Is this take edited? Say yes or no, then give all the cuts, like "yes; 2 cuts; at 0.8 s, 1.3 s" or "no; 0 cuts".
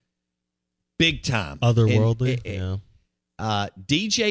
no; 0 cuts